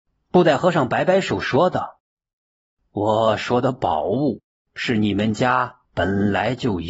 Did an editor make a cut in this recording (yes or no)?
yes